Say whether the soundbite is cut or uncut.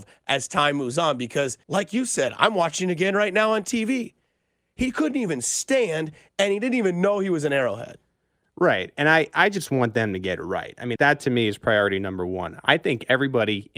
cut